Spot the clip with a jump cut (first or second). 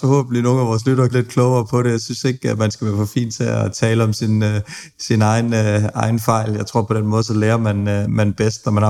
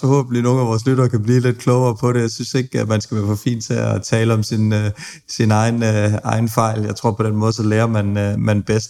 first